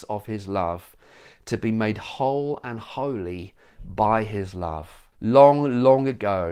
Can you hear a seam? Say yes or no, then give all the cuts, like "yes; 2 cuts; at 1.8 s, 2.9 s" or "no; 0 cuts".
yes; 1 cut; at 5.1 s